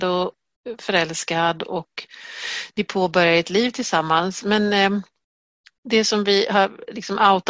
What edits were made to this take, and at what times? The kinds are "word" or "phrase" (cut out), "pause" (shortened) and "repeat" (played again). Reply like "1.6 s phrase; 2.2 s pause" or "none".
none